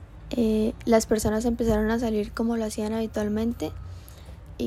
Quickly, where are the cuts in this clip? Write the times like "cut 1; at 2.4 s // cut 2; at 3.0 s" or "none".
none